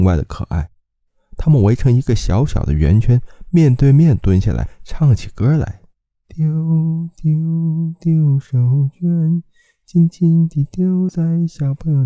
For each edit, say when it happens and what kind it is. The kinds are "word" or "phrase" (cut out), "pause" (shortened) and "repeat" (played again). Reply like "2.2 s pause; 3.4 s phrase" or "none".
6.0 s pause